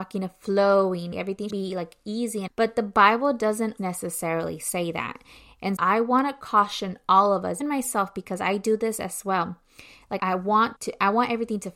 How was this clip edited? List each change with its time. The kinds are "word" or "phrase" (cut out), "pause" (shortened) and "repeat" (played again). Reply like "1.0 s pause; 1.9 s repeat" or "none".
1.1 s word; 1.5 s word; 2.5 s word; 3.8 s word; 5.8 s word; 7.6 s word; 10.2 s word; 10.8 s word